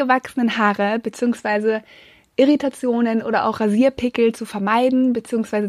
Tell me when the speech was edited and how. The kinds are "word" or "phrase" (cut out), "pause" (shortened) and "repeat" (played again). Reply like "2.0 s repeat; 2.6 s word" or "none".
none